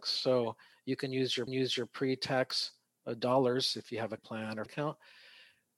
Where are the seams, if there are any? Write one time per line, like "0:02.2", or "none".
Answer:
0:01.5
0:04.2
0:04.7